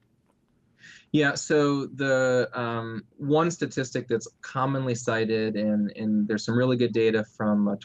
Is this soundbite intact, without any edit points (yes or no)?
no